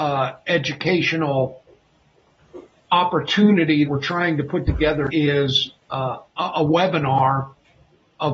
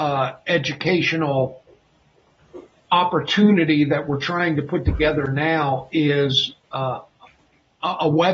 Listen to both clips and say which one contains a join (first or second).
first